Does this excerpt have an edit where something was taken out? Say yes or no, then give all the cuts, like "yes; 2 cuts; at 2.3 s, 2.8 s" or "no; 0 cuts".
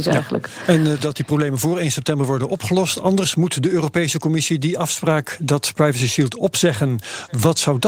yes; 1 cut; at 1.0 s